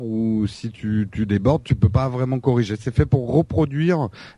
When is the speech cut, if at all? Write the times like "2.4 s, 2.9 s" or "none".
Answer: none